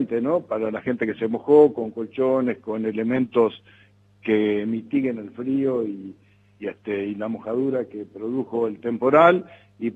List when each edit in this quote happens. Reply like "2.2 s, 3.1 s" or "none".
none